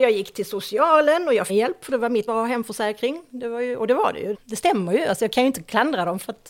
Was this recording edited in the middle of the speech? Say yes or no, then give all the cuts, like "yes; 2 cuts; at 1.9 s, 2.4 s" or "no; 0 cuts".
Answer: yes; 3 cuts; at 1.5 s, 2.3 s, 4.3 s